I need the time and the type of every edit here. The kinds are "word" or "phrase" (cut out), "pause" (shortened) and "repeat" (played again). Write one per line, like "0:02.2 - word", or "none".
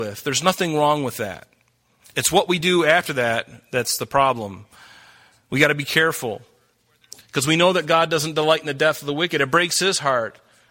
none